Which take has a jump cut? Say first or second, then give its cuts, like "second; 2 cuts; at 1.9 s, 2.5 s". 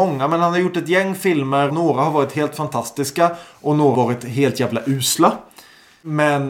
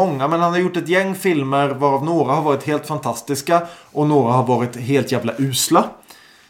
first; 2 cuts; at 1.7 s, 3.9 s